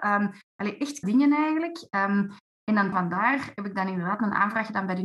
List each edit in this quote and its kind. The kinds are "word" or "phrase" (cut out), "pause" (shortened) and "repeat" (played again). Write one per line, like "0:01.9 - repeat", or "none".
0:01.0 - word
0:02.9 - word

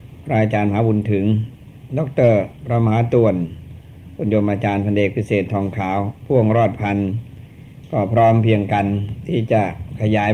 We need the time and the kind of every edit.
0:02.6 - pause

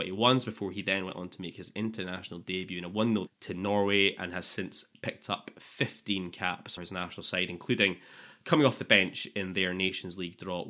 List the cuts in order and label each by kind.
0:03.3 - word
0:06.8 - word

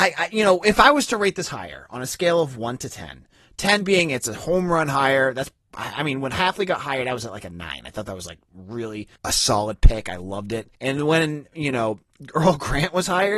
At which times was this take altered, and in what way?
0:09.2 - pause
0:10.7 - pause

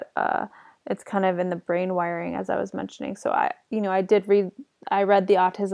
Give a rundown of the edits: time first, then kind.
none

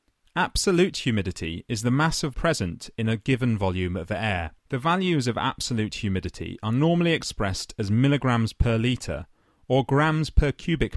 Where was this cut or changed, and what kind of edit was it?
0:02.3 - phrase
0:04.6 - pause

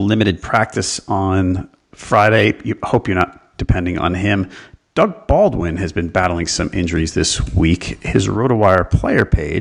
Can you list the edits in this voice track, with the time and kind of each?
none

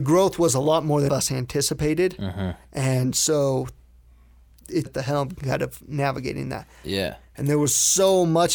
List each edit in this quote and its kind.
0:01.1 - phrase
0:04.9 - phrase

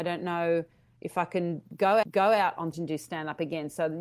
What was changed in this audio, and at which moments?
0:02.0 - repeat
0:02.7 - word

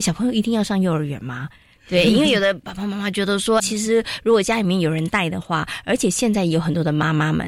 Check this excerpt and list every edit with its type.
0:03.6 - word

